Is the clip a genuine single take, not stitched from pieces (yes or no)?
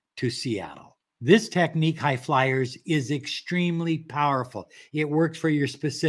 yes